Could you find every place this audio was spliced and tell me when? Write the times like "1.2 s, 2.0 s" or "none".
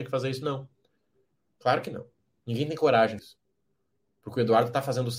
3.2 s